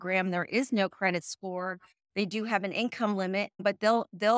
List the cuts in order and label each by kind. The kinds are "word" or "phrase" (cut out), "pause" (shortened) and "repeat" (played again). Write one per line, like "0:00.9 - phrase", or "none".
none